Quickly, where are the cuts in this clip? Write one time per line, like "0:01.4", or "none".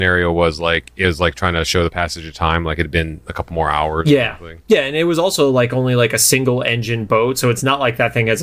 0:04.6